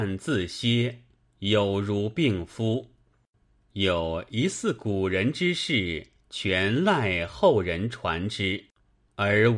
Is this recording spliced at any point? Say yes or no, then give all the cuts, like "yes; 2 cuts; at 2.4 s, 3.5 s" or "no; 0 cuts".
no; 0 cuts